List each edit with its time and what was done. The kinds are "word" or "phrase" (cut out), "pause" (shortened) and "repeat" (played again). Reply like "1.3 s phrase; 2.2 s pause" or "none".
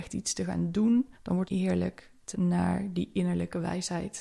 1.1 s pause; 1.5 s phrase; 2.3 s word